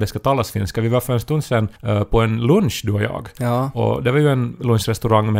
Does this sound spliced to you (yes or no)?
yes